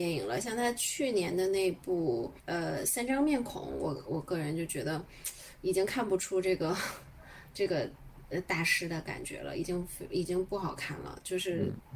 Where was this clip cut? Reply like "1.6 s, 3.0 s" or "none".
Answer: 2.4 s